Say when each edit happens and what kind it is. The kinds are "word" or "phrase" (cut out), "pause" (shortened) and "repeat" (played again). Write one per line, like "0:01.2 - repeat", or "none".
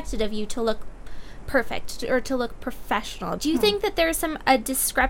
0:03.4 - word